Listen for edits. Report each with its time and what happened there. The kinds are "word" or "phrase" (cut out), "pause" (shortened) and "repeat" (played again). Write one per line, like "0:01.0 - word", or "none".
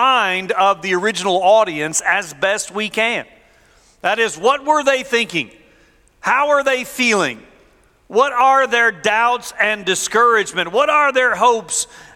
none